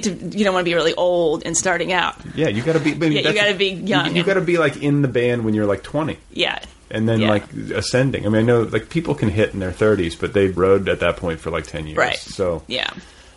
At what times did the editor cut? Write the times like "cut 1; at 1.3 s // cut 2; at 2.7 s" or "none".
cut 1; at 1.4 s // cut 2; at 6.2 s // cut 3; at 10.6 s